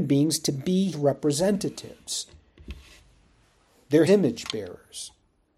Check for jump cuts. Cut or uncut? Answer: cut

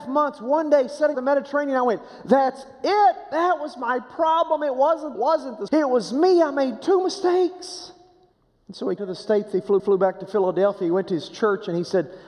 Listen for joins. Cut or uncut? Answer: cut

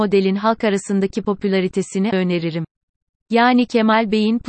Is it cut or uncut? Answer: cut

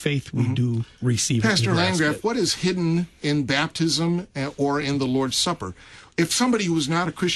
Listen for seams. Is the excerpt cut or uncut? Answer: uncut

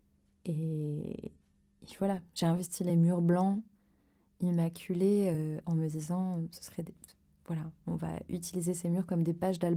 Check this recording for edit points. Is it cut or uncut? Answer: uncut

